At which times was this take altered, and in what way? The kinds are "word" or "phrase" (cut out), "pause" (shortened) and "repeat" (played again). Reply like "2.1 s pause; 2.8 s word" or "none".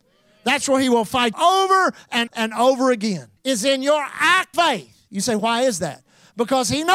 1.3 s word; 2.3 s word; 3.4 s pause; 4.5 s word